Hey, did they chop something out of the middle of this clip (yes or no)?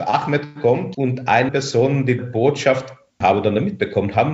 yes